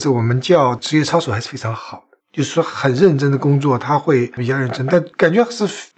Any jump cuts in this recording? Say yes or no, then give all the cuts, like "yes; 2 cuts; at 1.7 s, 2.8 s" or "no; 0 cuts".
yes; 1 cut; at 2.2 s